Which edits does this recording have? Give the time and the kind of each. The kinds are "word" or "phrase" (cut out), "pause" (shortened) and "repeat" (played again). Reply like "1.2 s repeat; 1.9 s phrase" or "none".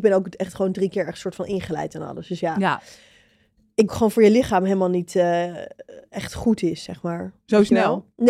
3.9 s phrase